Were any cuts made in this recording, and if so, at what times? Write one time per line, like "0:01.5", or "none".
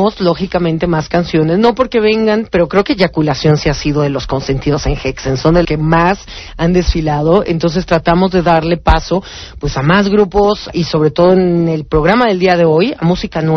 0:05.6
0:10.7